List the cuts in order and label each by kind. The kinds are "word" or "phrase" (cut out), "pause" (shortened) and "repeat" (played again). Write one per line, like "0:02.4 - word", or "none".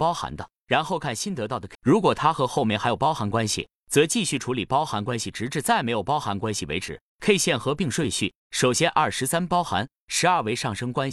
0:01.7 - word